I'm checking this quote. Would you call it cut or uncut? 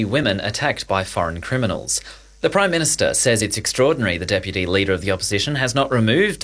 uncut